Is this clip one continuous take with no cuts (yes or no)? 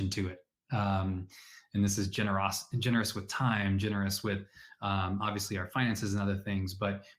yes